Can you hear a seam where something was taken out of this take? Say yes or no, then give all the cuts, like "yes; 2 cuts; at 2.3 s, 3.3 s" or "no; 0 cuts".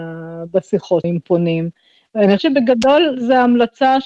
yes; 2 cuts; at 1.0 s, 2.4 s